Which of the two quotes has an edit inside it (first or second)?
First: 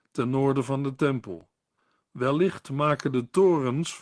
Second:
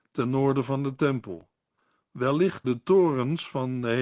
second